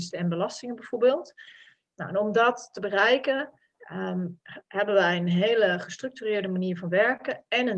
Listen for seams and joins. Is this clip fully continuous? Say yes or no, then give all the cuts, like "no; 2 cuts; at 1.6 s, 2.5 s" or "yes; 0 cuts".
yes; 0 cuts